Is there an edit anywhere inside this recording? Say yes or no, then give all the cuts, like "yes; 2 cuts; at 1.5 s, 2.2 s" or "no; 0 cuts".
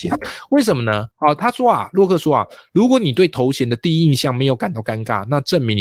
yes; 1 cut; at 1.1 s